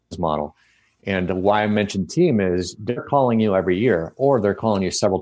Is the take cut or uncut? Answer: uncut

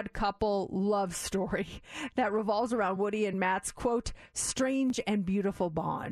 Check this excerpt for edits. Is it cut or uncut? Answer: uncut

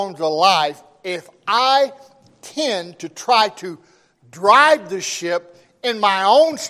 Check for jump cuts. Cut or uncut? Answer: uncut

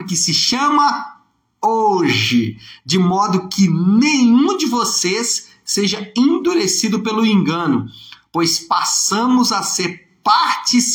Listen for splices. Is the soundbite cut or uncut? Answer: uncut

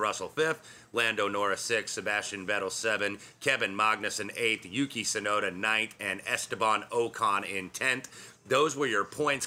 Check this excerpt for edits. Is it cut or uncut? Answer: uncut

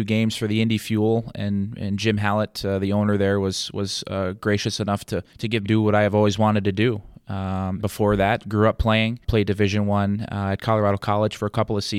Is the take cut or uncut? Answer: cut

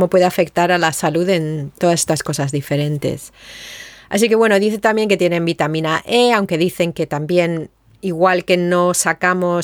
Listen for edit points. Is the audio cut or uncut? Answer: uncut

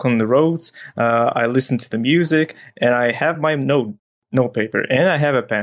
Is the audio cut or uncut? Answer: uncut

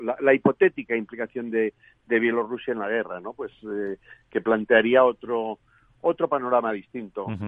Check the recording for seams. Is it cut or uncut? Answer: uncut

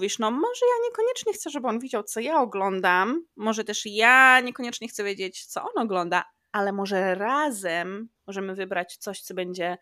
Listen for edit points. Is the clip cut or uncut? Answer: uncut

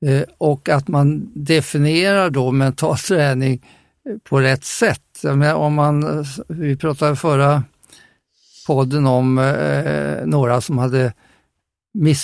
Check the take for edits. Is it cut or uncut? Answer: uncut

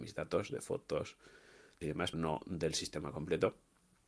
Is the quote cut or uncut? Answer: cut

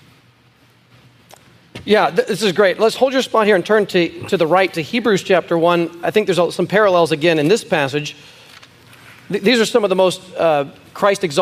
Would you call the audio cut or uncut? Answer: uncut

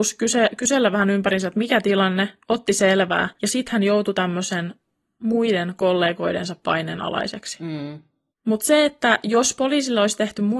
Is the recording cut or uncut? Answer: uncut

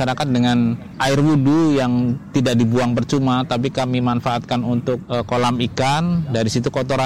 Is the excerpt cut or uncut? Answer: cut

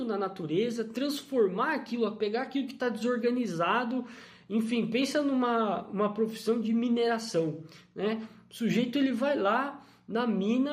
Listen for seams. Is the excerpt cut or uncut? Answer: uncut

